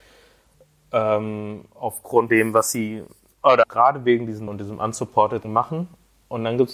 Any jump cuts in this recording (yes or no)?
yes